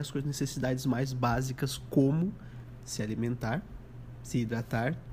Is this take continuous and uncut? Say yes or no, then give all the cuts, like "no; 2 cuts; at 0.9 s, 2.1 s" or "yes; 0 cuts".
yes; 0 cuts